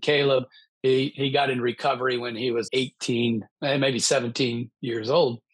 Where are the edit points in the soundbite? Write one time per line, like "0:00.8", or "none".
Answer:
0:02.7
0:03.5

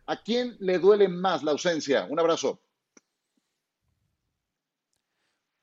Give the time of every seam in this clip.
none

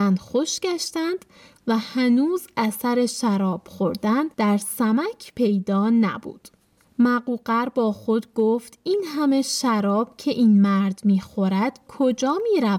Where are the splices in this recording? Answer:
0:04.3
0:11.9

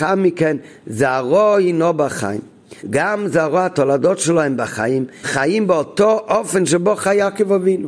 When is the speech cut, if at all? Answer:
0:02.8
0:05.2

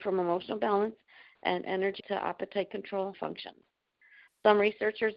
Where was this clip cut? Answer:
0:02.0
0:03.1

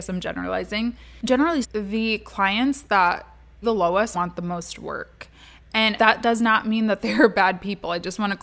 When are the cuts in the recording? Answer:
0:01.6
0:03.6
0:04.1
0:06.0

